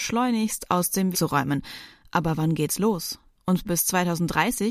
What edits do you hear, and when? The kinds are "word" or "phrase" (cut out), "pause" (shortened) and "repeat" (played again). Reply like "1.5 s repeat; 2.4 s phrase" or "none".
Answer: 1.1 s word; 3.6 s phrase

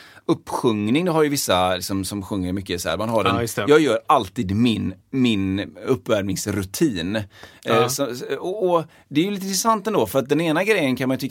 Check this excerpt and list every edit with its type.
5.0 s pause

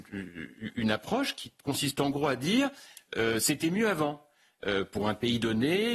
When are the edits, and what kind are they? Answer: none

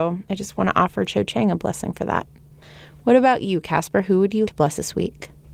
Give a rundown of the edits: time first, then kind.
4.5 s word

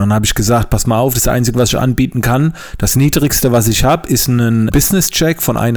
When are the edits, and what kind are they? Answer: 4.7 s word

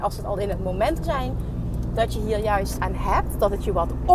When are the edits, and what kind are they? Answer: 1.0 s word; 2.8 s word

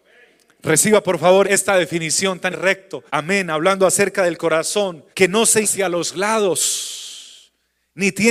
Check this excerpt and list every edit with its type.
1.4 s word; 2.5 s phrase; 3.1 s pause; 5.1 s pause; 5.6 s word

